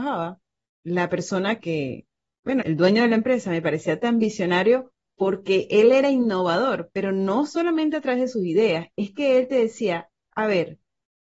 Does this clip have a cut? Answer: yes; 2 cuts; at 1.6 s, 2.6 s

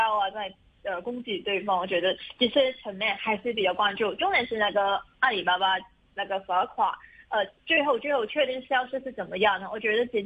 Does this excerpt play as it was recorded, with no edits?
yes; 0 cuts

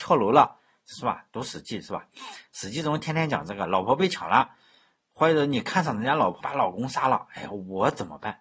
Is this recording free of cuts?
no; 1 cut; at 6.4 s

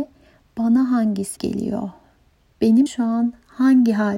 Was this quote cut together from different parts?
yes; 2 cuts; at 1.4 s, 2.9 s

